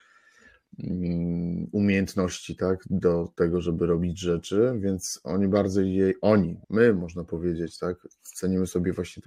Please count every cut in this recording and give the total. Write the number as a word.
one